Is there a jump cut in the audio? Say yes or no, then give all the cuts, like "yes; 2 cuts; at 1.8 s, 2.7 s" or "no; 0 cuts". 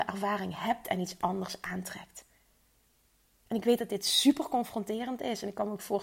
no; 0 cuts